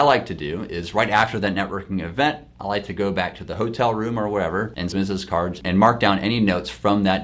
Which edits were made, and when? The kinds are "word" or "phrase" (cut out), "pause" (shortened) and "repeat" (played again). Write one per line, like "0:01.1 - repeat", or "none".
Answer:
0:04.9 - phrase